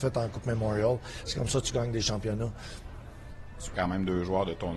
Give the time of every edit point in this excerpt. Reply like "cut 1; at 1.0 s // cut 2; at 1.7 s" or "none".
cut 1; at 3.7 s